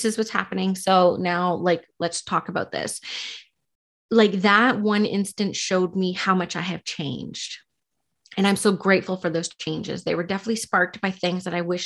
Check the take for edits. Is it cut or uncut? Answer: uncut